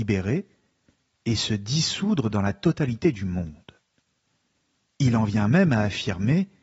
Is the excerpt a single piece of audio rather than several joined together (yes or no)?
yes